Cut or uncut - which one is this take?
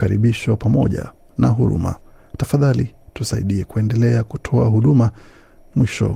uncut